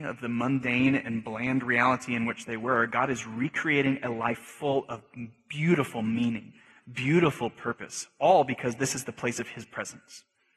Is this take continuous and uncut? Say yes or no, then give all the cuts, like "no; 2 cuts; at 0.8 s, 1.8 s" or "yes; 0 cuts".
yes; 0 cuts